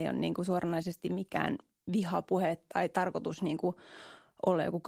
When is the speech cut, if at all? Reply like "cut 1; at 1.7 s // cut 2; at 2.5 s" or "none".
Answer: none